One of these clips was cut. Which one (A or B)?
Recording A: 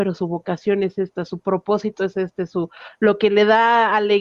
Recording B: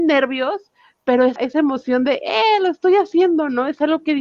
B